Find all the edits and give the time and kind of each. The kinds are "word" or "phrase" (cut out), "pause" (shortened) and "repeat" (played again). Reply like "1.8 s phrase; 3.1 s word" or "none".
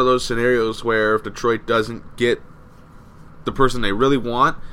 3.4 s word